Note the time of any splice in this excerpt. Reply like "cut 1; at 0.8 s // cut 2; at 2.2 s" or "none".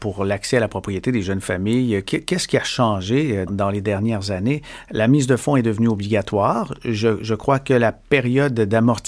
cut 1; at 3.5 s

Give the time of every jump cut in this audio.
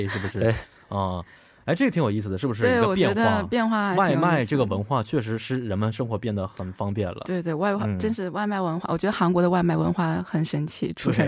none

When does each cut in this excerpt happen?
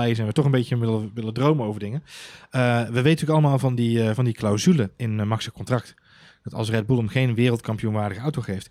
none

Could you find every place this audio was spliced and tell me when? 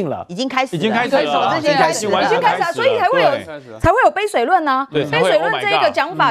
none

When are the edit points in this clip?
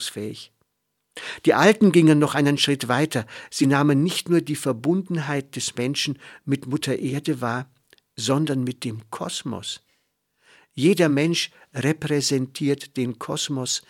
none

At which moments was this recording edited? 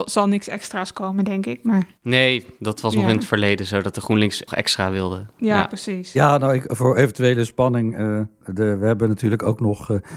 cut 1; at 4.5 s

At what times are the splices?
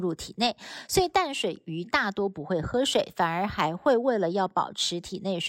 none

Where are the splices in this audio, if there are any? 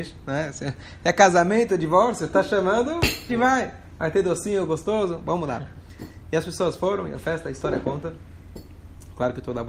cut 1; at 3.3 s

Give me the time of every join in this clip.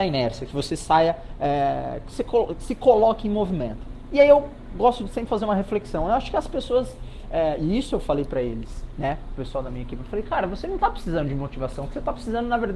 none

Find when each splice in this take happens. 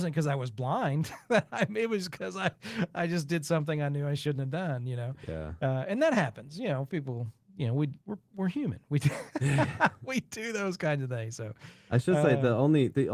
cut 1; at 8.0 s

